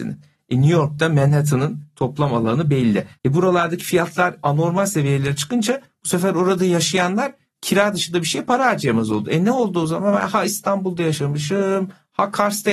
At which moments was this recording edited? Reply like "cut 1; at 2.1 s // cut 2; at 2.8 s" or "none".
cut 1; at 3.1 s